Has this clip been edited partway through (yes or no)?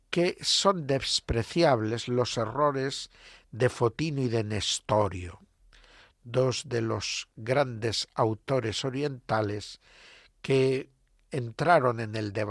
no